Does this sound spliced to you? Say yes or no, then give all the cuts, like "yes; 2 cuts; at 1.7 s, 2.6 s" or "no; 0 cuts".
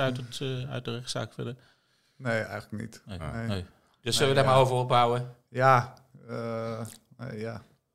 no; 0 cuts